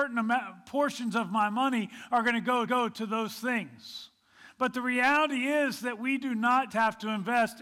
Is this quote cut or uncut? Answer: cut